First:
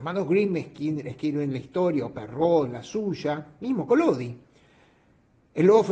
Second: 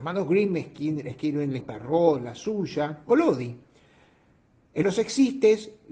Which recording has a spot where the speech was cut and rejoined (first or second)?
second